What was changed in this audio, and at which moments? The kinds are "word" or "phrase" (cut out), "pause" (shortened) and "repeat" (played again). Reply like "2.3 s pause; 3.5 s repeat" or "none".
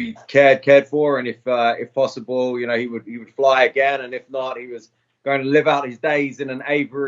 none